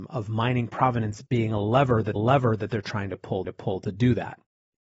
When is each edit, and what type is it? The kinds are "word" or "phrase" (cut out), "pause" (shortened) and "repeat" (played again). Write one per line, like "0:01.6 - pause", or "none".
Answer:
0:02.2 - repeat
0:03.4 - repeat